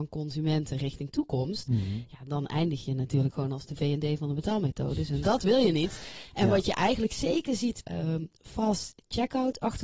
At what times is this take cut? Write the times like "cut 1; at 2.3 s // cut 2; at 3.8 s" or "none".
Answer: cut 1; at 5.2 s // cut 2; at 7.8 s

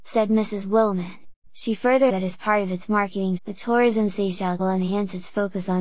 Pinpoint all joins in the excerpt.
cut 1; at 1.4 s // cut 2; at 2.1 s // cut 3; at 3.4 s // cut 4; at 4.6 s

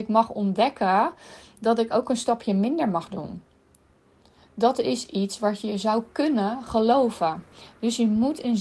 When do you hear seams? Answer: none

